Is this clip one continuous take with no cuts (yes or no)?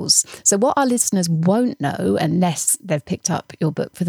yes